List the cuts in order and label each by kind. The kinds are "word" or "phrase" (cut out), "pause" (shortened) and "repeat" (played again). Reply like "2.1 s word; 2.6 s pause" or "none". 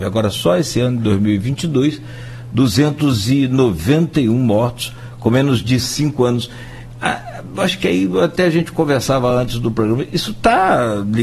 none